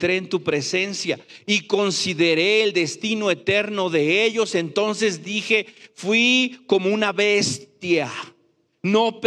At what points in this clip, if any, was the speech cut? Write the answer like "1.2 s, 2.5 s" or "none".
none

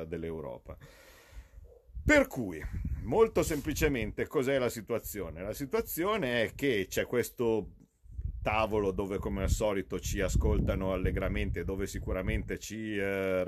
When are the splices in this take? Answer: none

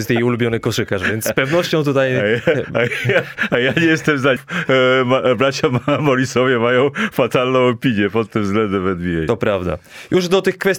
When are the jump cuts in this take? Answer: 4.4 s

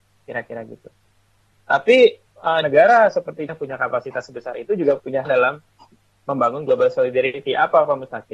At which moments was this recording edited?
2.3 s, 2.6 s, 3.5 s, 5.2 s

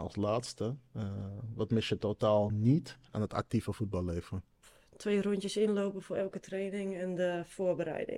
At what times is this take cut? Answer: none

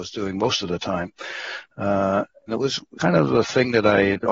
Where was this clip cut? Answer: 2.5 s, 3.0 s

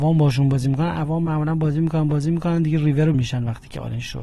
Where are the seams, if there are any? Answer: 3.1 s

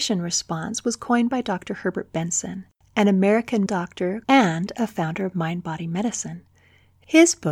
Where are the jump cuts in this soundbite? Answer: 3.7 s, 4.2 s

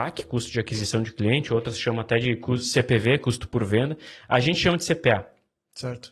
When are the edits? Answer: none

